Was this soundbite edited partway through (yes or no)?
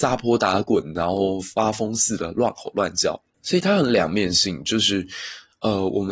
yes